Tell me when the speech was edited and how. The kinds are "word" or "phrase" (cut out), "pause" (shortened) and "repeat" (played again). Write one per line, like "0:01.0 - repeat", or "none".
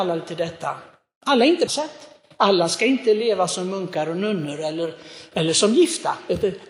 0:01.7 - phrase